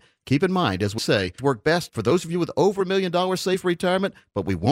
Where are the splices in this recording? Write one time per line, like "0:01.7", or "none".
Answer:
0:01.0
0:01.4

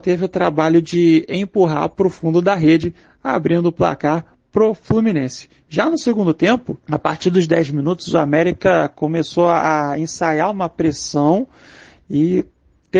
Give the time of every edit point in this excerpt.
0:06.8

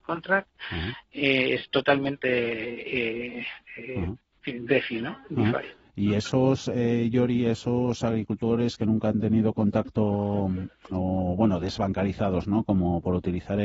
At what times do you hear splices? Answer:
none

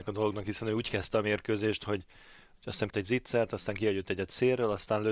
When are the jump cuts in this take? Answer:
0:02.9

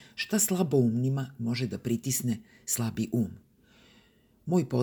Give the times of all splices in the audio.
none

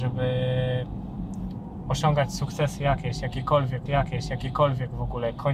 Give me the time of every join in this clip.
0:03.9

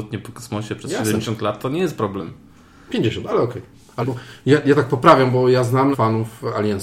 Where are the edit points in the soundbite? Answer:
0:04.0
0:05.9

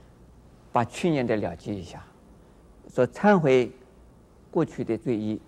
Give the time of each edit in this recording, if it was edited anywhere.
none

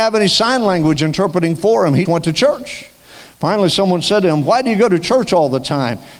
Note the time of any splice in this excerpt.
0:02.0

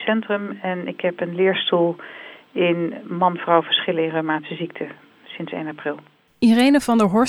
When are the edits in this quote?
none

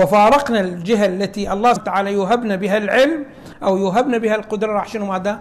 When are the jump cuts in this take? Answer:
0:01.8

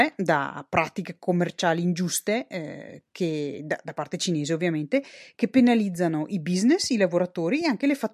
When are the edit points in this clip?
none

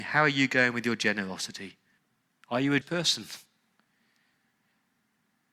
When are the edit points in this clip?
0:02.0
0:02.8

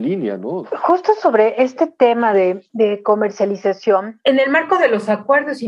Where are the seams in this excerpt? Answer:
none

